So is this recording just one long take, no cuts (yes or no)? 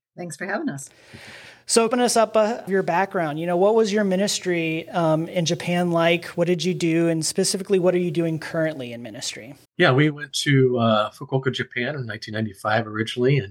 no